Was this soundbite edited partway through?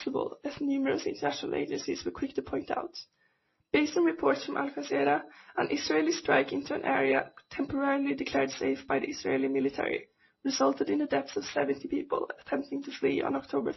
no; 0 cuts

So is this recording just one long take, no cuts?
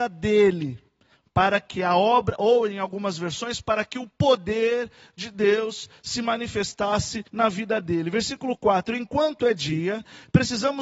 no; 1 cut; at 7.3 s

